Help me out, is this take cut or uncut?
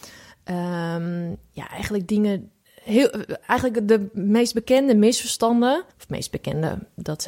cut